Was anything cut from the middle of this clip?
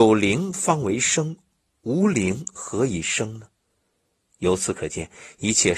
no; 0 cuts

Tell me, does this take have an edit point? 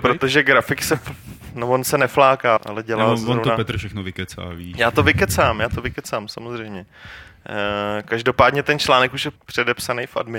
yes; 2 cuts; at 2.6 s, 9.4 s

